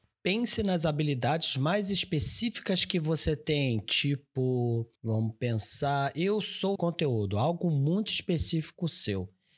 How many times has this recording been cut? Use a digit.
2